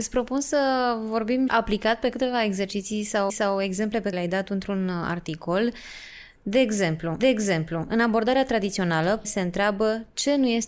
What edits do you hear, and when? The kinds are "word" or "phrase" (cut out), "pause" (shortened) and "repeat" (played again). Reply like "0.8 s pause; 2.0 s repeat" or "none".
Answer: 1.5 s word; 3.3 s repeat; 4.1 s word; 7.2 s repeat; 9.2 s word

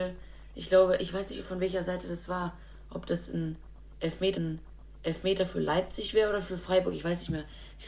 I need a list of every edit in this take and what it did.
4.3 s repeat

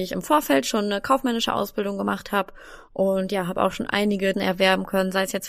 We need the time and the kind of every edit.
4.3 s word

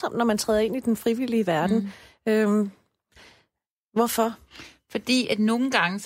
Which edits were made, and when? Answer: none

